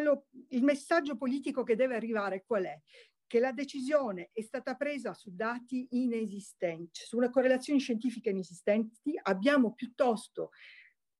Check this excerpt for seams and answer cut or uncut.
uncut